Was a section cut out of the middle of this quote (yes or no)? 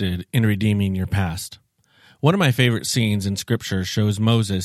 no